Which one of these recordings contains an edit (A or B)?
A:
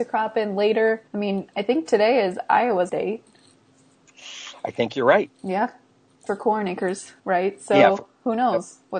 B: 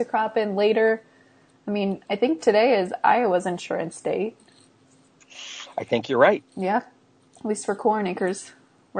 A